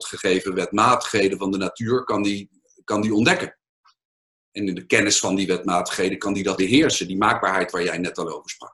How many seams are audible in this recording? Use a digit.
1